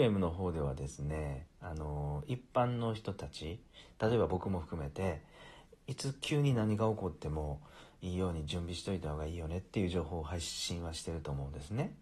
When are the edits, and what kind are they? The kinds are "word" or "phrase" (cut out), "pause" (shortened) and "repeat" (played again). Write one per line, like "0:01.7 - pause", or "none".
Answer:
none